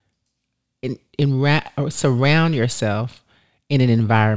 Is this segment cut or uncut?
uncut